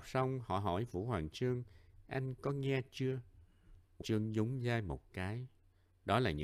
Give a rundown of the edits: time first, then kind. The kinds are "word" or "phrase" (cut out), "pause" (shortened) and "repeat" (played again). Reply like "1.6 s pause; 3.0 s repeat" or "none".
4.0 s word